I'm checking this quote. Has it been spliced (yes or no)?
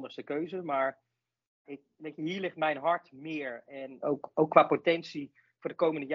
yes